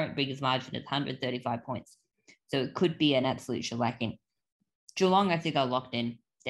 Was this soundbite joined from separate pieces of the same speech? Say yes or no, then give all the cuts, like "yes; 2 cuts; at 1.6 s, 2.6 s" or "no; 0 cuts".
no; 0 cuts